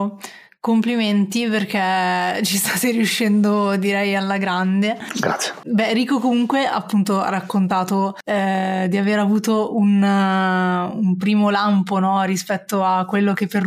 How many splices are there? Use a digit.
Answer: 0